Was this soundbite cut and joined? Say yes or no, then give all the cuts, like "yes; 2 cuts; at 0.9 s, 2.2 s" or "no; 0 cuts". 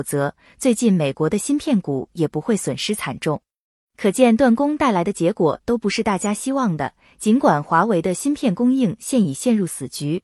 no; 0 cuts